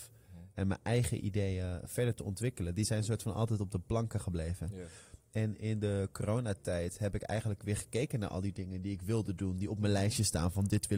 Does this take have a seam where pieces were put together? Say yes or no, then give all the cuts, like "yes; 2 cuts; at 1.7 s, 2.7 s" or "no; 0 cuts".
no; 0 cuts